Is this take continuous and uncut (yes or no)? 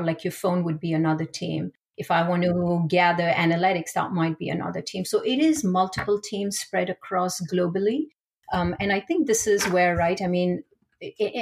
yes